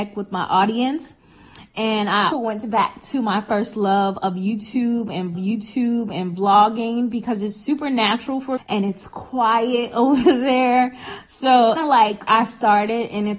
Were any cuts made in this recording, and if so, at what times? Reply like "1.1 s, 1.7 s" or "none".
2.3 s, 5.3 s, 8.6 s, 11.8 s, 12.3 s